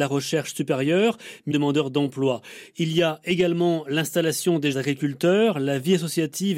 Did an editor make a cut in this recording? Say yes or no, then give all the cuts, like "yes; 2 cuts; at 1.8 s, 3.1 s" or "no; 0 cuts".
yes; 2 cuts; at 1.5 s, 4.7 s